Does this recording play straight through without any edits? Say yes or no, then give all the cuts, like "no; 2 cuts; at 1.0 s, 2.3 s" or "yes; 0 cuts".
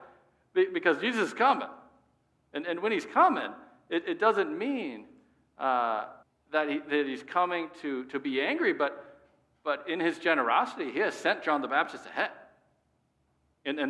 no; 1 cut; at 6.2 s